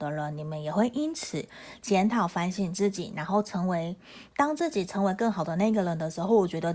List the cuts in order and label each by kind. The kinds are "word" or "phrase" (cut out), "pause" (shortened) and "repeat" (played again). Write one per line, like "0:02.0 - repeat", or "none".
none